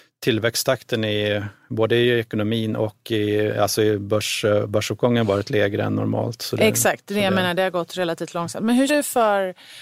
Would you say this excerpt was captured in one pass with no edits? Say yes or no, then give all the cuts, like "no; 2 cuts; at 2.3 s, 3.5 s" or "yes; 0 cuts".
no; 1 cut; at 8.9 s